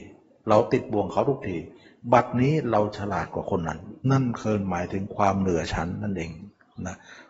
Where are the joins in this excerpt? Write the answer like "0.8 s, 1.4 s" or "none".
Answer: 4.0 s